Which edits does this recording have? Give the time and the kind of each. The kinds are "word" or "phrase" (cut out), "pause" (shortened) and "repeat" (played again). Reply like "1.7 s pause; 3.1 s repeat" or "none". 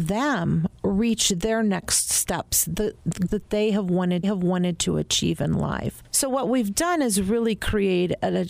3.3 s word; 4.2 s repeat

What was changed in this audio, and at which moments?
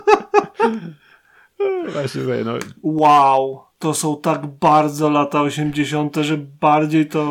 none

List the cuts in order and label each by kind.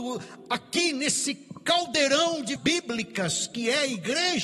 2.6 s word

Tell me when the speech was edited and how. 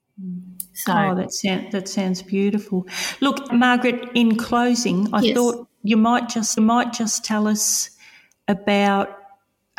3.5 s word; 6.6 s repeat

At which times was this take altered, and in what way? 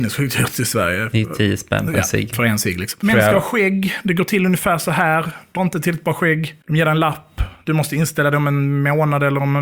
5.6 s word

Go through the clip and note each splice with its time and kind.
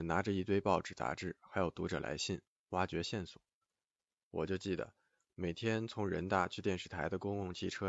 none

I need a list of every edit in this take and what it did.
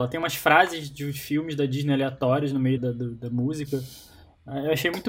2.8 s word

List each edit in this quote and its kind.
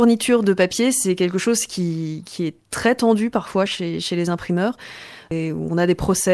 none

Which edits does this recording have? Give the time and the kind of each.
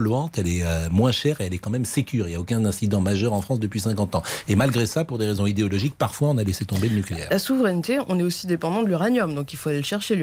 none

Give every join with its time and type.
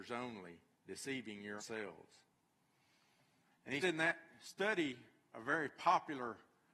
1.6 s word; 3.8 s word; 5.3 s word

